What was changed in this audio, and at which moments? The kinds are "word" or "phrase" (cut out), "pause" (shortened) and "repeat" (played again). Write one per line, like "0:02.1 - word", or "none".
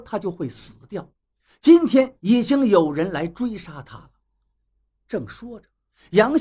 none